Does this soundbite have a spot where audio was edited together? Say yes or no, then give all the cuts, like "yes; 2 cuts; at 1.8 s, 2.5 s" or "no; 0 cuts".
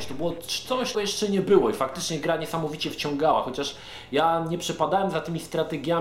yes; 1 cut; at 0.9 s